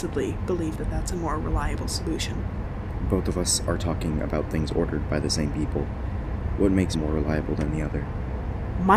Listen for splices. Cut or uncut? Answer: cut